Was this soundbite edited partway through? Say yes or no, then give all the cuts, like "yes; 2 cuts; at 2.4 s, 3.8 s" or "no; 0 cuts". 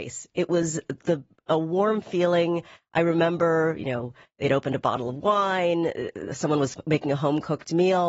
no; 0 cuts